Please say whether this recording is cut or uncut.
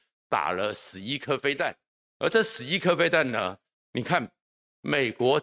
uncut